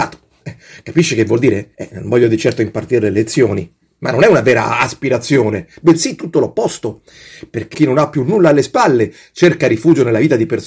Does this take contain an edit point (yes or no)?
yes